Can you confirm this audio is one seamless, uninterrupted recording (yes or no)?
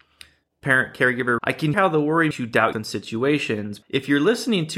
no